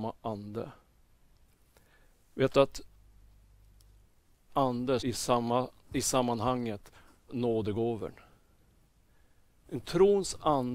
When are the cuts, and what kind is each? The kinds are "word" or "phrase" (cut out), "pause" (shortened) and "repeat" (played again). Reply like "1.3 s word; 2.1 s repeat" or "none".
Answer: 4.5 s word; 5.0 s word; 7.3 s word